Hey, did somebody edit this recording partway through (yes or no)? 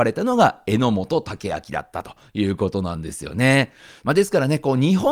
no